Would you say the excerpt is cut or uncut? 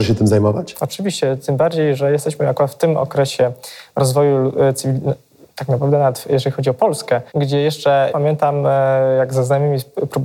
cut